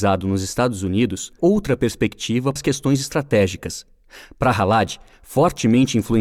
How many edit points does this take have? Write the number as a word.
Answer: two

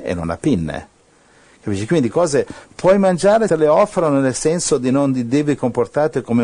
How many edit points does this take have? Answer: two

